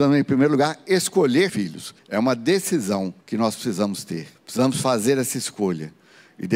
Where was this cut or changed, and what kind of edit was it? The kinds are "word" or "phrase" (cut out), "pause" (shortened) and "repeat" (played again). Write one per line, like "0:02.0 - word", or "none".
0:01.5 - word
0:02.0 - pause
0:03.2 - pause
0:04.4 - pause

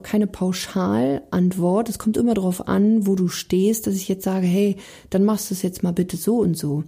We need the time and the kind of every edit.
none

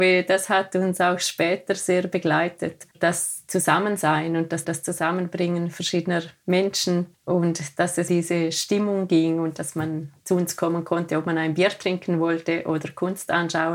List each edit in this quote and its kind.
0:02.9 - pause
0:04.6 - repeat
0:07.1 - pause
0:08.1 - word
0:10.2 - pause

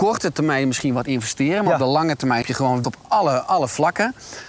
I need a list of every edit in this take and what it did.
0:02.4 - word
0:02.8 - word

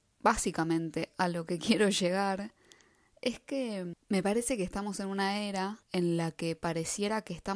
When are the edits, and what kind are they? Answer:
0:05.8 - pause

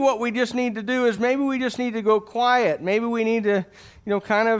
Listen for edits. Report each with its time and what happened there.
none

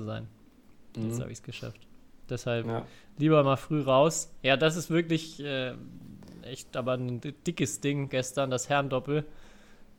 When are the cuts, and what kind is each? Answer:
none

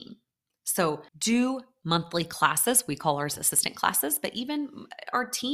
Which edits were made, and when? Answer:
0:01.1 - pause

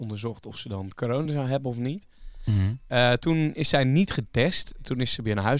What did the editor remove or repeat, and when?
none

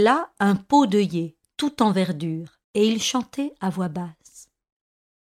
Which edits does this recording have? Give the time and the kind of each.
0:02.6 - pause

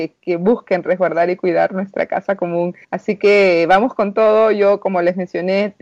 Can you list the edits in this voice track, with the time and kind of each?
0:02.8 - pause

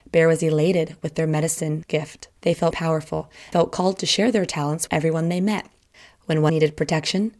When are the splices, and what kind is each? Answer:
0:02.4 - pause
0:02.7 - phrase
0:03.5 - word
0:04.9 - word
0:05.9 - pause
0:06.5 - phrase

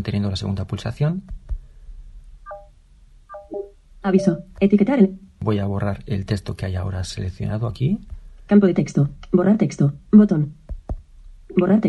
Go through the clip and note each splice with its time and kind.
none

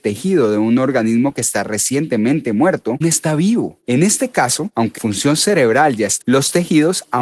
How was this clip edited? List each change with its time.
0:03.0 - word
0:05.0 - word
0:06.2 - word

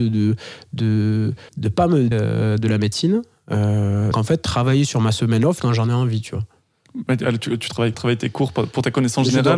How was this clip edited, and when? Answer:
0:01.5 - pause
0:02.1 - word
0:04.1 - word
0:05.6 - word
0:07.9 - phrase

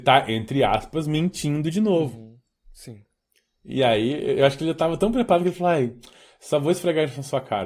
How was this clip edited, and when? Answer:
none

